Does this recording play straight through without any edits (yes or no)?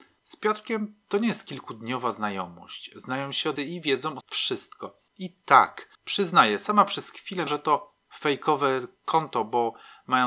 no